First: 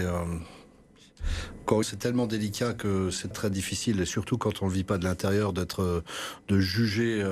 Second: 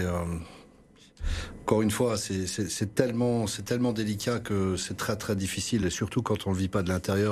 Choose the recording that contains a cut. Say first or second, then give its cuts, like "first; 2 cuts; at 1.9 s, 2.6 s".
first; 2 cuts; at 1.8 s, 3.3 s